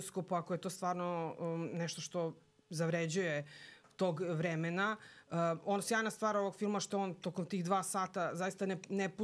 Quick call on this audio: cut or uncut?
uncut